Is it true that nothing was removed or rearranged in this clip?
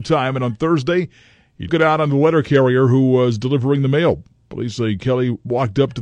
no; 1 cut; at 1.7 s

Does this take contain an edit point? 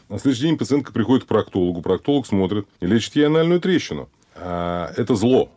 yes; 2 cuts; at 2.7 s, 4.2 s

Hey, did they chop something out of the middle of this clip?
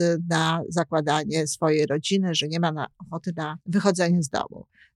yes; 1 cut; at 3.6 s

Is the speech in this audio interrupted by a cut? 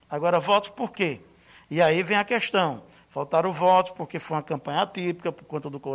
no; 0 cuts

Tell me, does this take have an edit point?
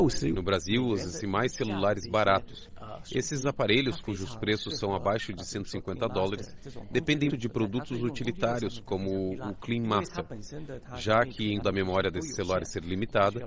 yes; 2 cuts; at 7.3 s, 11.6 s

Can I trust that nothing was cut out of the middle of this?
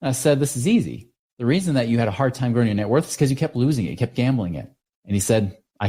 yes; 0 cuts

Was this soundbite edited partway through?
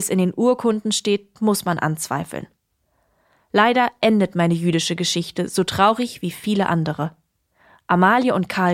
no; 0 cuts

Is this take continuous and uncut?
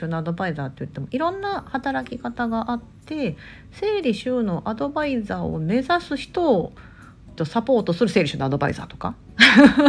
no; 1 cut; at 7.4 s

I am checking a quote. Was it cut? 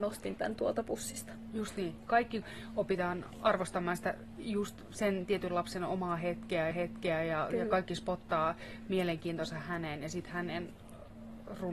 yes; 2 cuts; at 2.4 s, 6.7 s

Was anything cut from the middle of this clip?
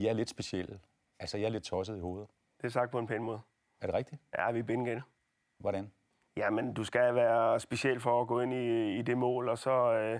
no; 0 cuts

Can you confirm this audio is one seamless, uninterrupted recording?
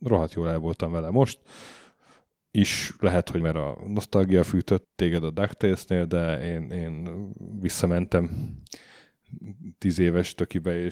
no; 2 cuts; at 3.4 s, 4.8 s

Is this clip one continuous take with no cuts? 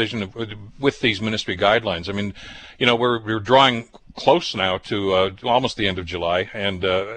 yes; 0 cuts

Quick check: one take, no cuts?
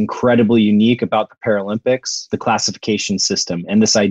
no; 1 cut; at 2.3 s

